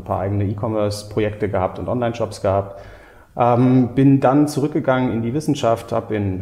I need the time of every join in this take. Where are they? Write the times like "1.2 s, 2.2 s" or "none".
none